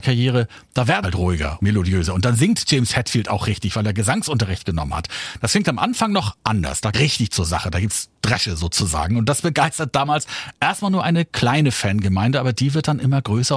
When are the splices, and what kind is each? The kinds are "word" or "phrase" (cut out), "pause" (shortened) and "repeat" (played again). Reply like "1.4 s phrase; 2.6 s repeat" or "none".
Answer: 1.0 s word; 1.6 s word; 6.9 s word

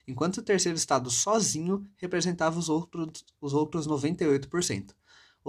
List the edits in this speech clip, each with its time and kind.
none

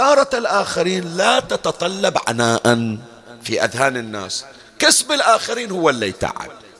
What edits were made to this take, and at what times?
none

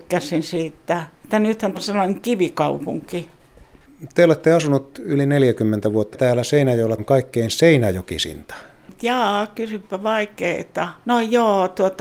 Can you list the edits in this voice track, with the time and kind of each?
1.1 s pause; 1.7 s word; 6.1 s phrase; 7.0 s word; 11.0 s pause

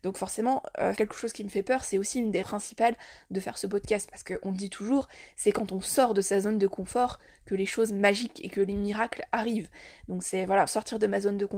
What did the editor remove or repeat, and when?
1.0 s word; 2.4 s word; 10.7 s word

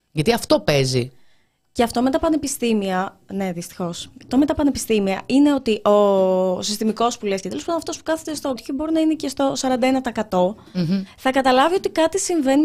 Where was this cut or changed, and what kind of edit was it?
4.3 s word; 7.4 s word; 8.6 s word

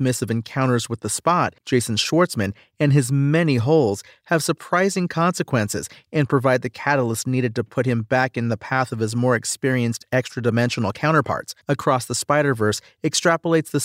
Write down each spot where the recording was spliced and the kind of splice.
1.6 s pause; 11.6 s pause

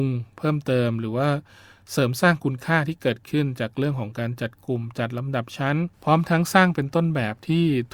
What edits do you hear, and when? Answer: 5.9 s pause

